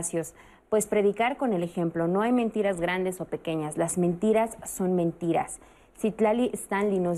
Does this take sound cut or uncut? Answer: uncut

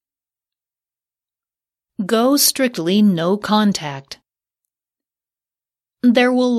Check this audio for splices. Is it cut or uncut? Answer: uncut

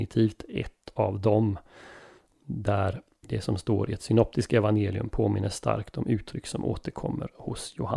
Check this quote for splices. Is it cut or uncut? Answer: uncut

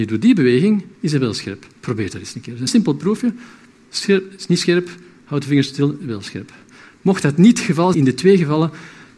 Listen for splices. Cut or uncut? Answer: cut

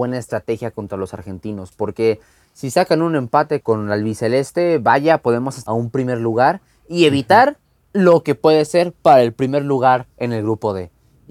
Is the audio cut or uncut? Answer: cut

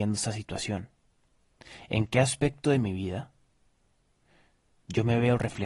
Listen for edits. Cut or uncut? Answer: uncut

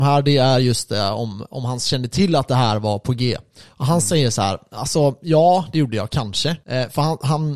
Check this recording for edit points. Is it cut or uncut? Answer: uncut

